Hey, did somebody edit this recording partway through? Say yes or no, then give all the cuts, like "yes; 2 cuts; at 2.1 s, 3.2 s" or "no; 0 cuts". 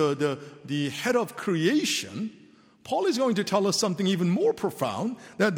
no; 0 cuts